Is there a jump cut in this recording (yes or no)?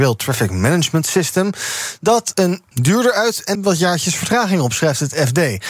yes